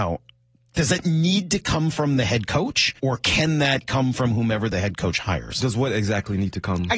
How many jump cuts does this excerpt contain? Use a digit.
1